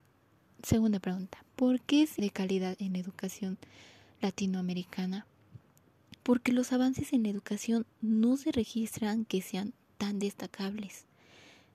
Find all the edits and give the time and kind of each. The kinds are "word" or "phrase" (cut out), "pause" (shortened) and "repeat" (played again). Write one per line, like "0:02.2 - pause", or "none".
0:01.5 - pause
0:02.2 - word
0:06.2 - pause